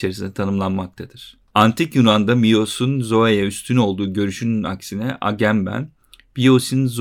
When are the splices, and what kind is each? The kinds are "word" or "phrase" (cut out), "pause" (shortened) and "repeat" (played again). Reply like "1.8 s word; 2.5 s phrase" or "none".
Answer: none